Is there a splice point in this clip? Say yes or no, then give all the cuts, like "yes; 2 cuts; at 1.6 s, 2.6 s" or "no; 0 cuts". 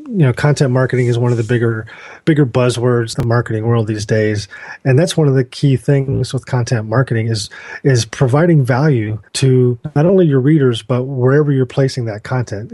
yes; 1 cut; at 9.3 s